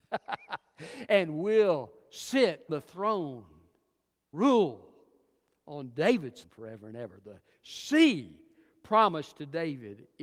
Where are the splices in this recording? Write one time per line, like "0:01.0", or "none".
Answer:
0:02.7
0:04.3
0:06.4